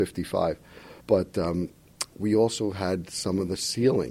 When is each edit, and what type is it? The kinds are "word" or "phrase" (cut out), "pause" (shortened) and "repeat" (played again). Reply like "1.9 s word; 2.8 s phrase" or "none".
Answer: 1.0 s pause